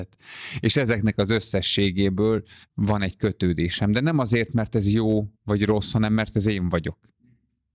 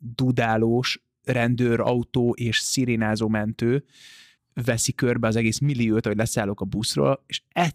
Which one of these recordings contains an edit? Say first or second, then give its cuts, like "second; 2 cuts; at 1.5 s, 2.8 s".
first; 2 cuts; at 2.6 s, 5.3 s